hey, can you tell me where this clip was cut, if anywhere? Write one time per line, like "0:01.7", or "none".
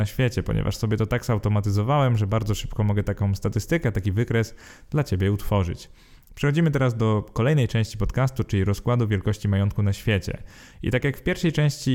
none